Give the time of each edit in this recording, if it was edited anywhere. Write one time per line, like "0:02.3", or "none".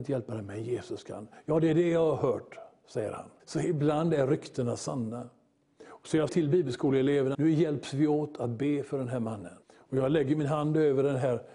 0:03.4
0:06.3
0:07.3
0:09.6